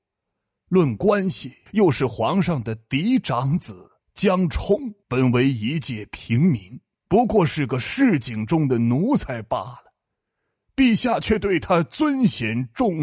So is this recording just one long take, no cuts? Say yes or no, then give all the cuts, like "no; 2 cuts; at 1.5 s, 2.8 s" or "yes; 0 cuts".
no; 4 cuts; at 1.7 s, 4.0 s, 5.0 s, 6.9 s